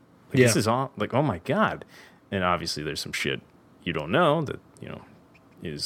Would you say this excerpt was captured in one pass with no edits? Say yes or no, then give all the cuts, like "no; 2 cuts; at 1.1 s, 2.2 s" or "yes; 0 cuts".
yes; 0 cuts